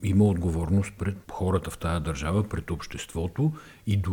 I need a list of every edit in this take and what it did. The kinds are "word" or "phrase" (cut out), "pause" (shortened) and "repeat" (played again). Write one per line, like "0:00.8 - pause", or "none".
0:01.3 - word